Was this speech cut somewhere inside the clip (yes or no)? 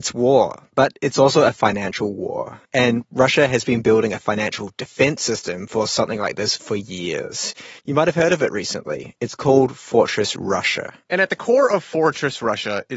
yes